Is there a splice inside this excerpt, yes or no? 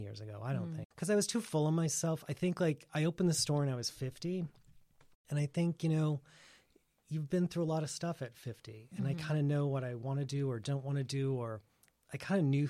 no